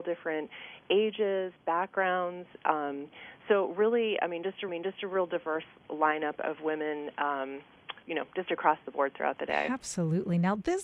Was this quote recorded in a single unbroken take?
no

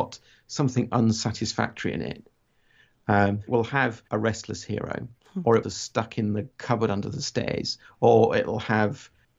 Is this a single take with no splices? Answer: no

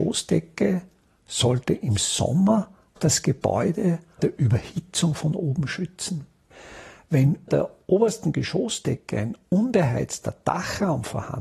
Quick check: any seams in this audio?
yes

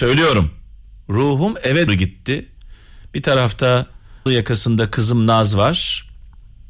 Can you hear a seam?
yes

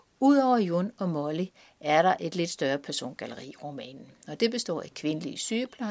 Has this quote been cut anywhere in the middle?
no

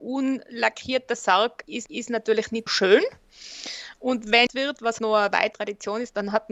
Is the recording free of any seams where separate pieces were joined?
no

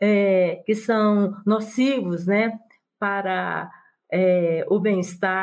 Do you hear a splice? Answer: no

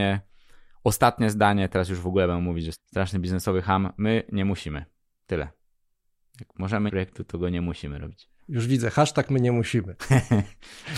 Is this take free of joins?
no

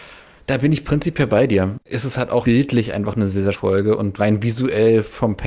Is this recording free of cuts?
no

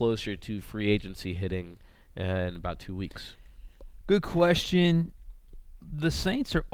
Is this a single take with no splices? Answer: yes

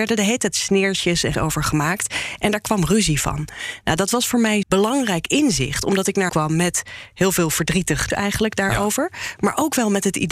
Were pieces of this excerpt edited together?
yes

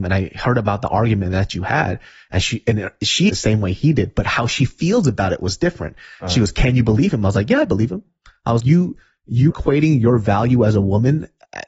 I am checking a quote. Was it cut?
yes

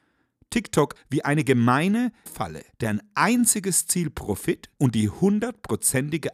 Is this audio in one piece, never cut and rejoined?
no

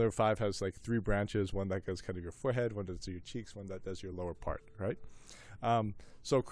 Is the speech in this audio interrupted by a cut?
no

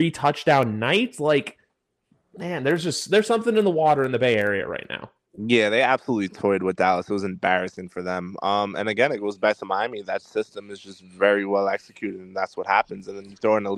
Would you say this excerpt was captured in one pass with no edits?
yes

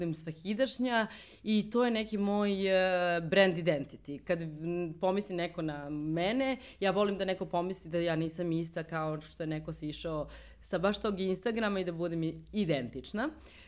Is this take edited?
no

